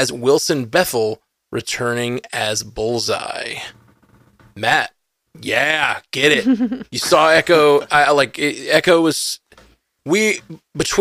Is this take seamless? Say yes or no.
yes